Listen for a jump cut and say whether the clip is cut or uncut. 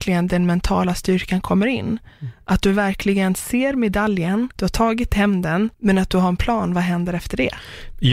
cut